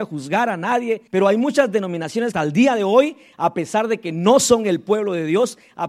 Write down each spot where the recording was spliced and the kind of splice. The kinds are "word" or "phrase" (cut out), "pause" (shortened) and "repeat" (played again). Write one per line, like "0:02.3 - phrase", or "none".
0:01.1 - pause
0:02.3 - phrase